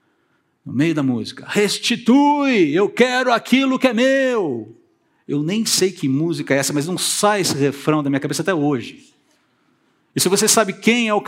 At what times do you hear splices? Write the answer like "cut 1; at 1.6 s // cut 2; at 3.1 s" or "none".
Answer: none

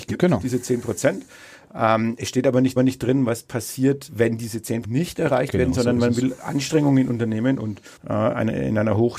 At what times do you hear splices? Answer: cut 1; at 2.8 s // cut 2; at 4.1 s // cut 3; at 4.8 s // cut 4; at 8.0 s

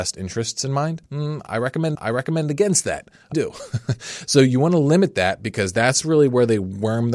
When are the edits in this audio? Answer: cut 1; at 1.1 s // cut 2; at 1.9 s // cut 3; at 3.3 s

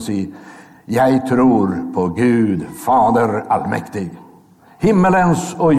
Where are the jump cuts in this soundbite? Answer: none

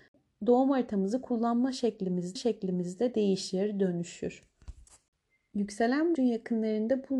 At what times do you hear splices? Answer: cut 1; at 2.4 s // cut 2; at 6.2 s

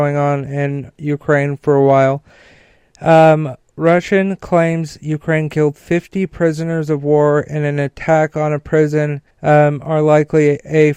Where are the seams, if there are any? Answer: cut 1; at 9.3 s

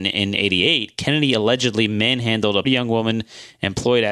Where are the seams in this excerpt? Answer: cut 1; at 2.6 s

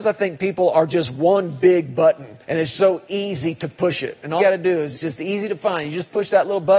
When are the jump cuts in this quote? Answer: cut 1; at 2.4 s // cut 2; at 2.7 s // cut 3; at 4.4 s // cut 4; at 4.9 s

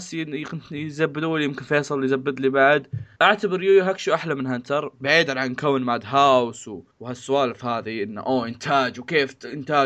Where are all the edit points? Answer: cut 1; at 3.2 s // cut 2; at 6.9 s

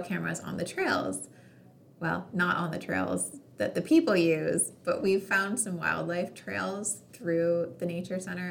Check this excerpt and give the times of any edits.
none

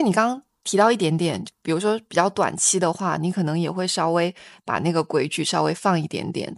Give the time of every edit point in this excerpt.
none

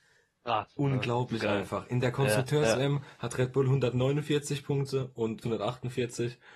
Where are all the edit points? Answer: cut 1; at 5.4 s

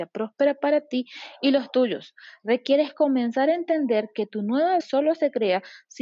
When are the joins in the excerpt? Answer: cut 1; at 4.8 s

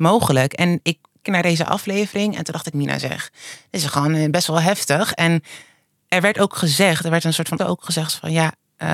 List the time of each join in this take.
cut 1; at 1.2 s // cut 2; at 2.7 s // cut 3; at 7.6 s

